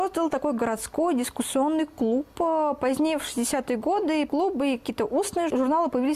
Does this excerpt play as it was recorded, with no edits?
no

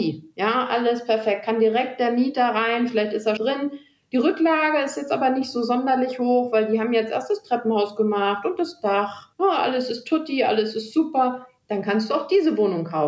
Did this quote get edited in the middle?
yes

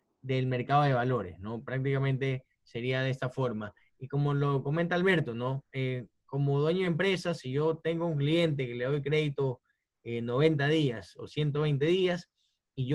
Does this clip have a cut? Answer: no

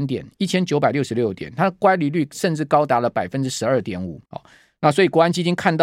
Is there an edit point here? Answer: yes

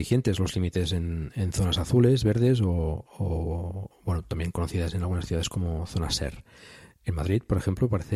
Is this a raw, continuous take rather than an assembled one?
yes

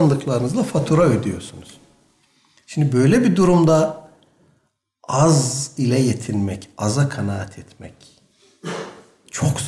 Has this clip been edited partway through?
no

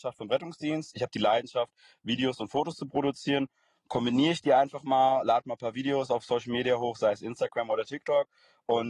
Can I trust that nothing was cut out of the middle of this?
yes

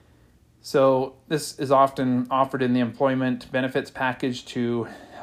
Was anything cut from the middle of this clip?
no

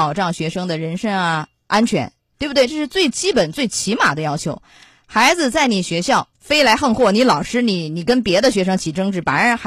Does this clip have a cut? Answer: yes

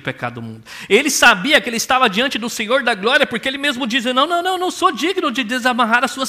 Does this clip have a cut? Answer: no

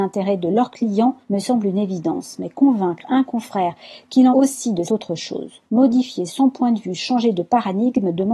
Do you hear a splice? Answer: yes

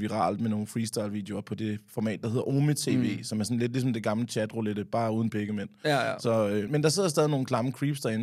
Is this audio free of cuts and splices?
no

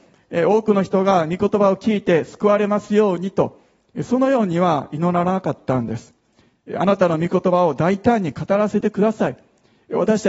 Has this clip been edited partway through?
no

